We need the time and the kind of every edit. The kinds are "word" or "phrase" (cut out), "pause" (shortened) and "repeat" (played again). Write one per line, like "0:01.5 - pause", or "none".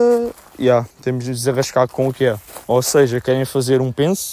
0:00.9 - pause
0:01.9 - word
0:02.6 - pause